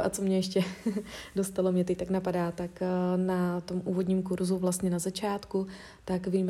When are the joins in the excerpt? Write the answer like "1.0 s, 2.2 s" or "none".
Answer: none